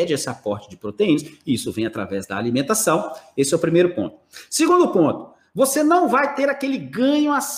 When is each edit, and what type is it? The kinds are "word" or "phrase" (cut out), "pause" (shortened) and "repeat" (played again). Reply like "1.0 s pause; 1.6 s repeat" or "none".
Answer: none